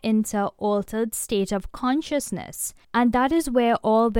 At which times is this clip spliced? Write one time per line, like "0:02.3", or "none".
0:02.8